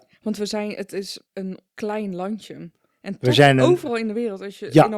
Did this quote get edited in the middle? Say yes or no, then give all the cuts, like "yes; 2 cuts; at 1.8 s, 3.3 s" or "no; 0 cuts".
no; 0 cuts